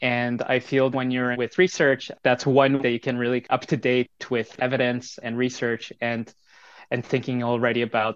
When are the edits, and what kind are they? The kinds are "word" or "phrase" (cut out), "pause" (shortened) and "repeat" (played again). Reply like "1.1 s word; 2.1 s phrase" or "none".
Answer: 0.9 s word; 1.3 s word; 2.8 s word; 3.5 s word; 4.6 s word; 5.2 s word